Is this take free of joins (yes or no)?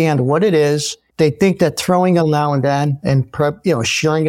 no